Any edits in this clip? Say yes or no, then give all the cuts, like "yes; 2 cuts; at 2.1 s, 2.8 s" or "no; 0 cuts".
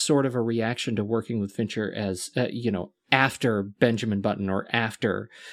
no; 0 cuts